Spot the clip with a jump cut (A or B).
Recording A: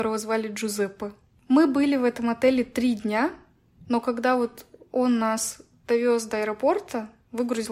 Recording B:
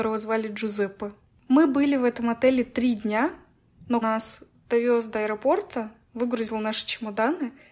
B